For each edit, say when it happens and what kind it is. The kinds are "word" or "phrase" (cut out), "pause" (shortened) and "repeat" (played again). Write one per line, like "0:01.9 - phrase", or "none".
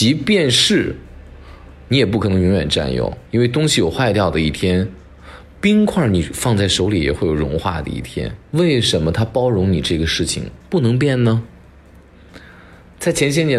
0:03.3 - pause
0:08.4 - pause
0:10.6 - pause